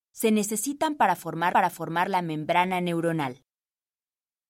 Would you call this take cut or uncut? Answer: cut